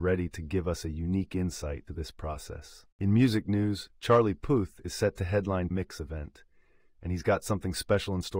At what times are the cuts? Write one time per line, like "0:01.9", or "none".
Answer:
0:01.9
0:02.9
0:05.7